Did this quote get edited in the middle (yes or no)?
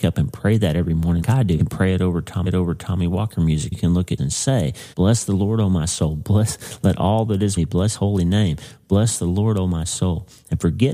yes